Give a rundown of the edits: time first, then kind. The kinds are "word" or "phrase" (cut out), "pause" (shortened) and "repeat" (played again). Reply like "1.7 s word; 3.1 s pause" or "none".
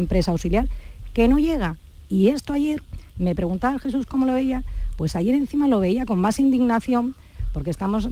none